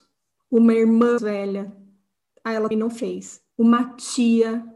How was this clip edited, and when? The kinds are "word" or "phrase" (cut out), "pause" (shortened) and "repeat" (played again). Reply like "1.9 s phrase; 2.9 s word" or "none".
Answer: 1.2 s word; 2.7 s word; 3.5 s pause